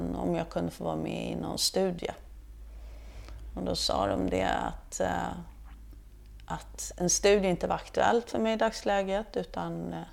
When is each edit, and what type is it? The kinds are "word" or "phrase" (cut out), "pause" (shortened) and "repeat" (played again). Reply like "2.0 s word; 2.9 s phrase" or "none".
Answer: none